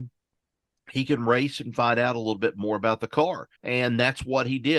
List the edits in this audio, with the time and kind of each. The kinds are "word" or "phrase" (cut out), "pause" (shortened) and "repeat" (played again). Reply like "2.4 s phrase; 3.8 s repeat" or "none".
3.6 s pause